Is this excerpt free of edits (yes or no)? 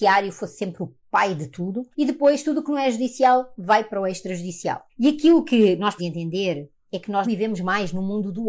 no